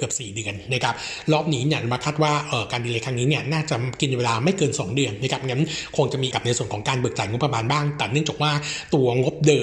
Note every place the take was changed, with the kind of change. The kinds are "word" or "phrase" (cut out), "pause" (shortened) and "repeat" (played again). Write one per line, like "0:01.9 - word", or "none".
0:06.3 - word

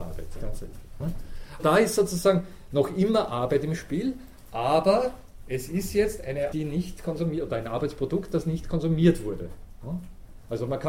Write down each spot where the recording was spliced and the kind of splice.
0:01.6 - word
0:06.5 - word

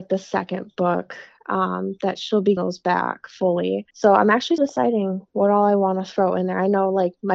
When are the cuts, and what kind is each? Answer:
0:02.6 - word
0:03.9 - pause
0:04.6 - word

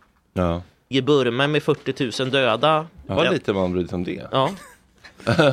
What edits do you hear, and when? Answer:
0:00.9 - word
0:03.2 - phrase

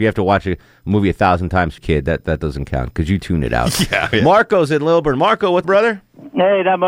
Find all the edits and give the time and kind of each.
0:01.8 - word
0:05.6 - word

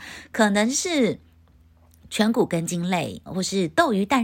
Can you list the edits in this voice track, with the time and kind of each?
0:03.3 - word

